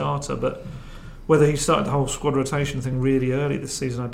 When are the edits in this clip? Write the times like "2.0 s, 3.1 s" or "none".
none